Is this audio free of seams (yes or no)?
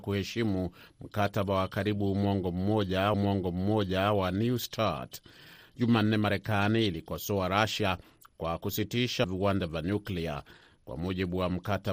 no